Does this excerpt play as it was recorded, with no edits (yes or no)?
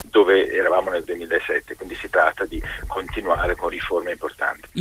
yes